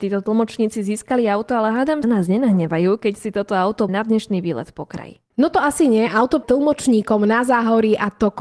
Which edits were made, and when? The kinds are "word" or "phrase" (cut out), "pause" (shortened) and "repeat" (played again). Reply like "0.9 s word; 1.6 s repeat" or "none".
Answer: 2.0 s phrase; 3.9 s word; 6.4 s word

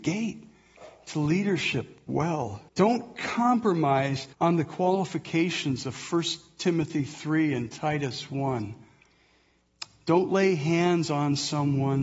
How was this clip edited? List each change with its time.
2.7 s pause; 4.3 s pause

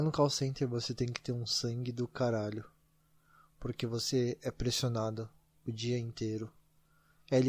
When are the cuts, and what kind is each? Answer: none

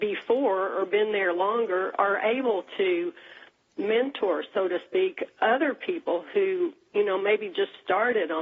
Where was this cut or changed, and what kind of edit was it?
none

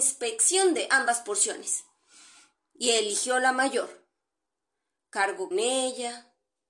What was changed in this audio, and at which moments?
5.5 s word

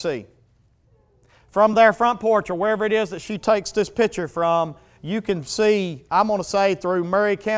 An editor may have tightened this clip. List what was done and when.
none

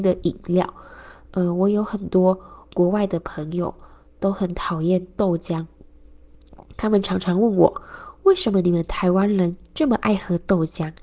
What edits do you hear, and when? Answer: none

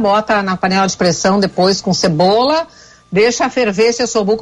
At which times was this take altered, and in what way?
none

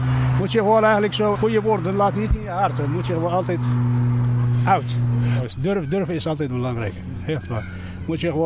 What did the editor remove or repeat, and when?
1.3 s word

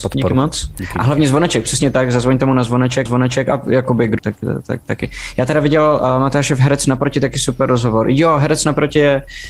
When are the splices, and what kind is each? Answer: 3.1 s repeat; 4.2 s phrase

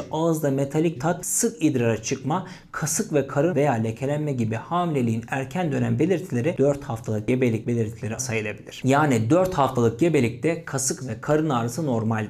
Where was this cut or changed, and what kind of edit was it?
1.0 s word; 3.5 s phrase; 8.2 s word; 11.0 s word

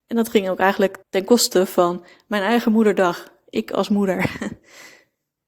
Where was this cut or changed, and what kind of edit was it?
1.0 s pause

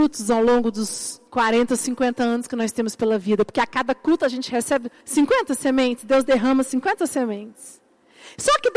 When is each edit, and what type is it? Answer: 1.3 s pause; 5.0 s pause

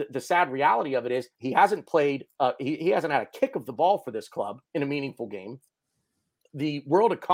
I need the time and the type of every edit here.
1.3 s pause; 4.7 s pause

